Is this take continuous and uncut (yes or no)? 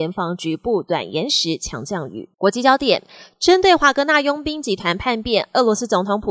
no